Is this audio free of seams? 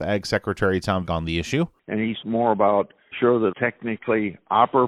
no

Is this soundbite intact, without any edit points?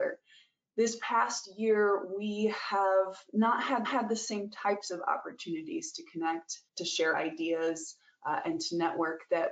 no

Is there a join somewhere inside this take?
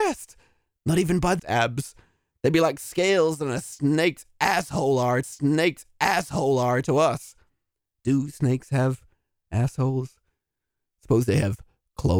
yes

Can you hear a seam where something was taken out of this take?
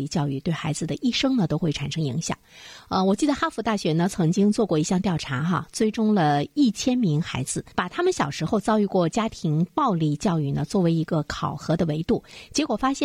yes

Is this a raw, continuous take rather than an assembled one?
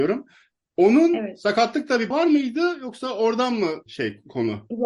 no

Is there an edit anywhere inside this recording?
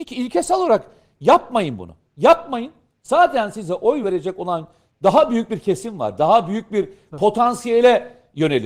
no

